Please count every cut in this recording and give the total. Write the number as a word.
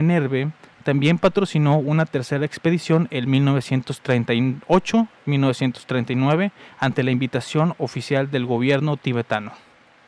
zero